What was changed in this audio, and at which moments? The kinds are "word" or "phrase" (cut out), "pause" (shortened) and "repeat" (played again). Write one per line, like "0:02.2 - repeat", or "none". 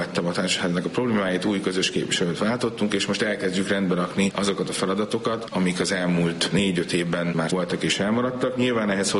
0:07.5 - word